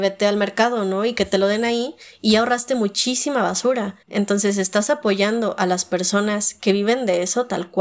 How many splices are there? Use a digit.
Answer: 1